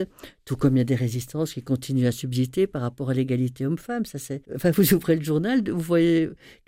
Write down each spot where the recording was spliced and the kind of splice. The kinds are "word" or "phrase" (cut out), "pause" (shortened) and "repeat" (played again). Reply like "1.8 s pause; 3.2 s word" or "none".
4.4 s pause